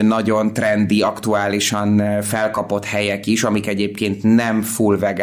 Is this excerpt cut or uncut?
uncut